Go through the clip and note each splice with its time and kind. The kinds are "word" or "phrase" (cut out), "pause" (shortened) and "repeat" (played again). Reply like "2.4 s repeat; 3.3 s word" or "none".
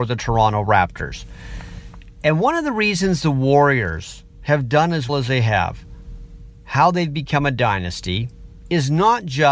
5.1 s word